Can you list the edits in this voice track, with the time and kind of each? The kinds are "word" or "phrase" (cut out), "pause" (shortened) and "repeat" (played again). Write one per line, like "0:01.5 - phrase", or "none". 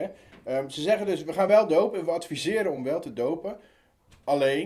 none